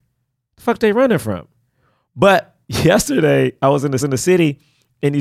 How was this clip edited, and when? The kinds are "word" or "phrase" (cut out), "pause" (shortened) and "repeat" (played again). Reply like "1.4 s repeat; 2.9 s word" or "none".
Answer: 2.6 s pause; 4.0 s repeat